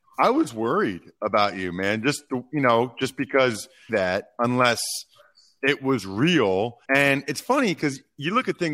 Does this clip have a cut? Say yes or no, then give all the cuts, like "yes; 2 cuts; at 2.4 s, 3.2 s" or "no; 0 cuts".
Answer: yes; 3 cuts; at 2.3 s, 3.9 s, 6.8 s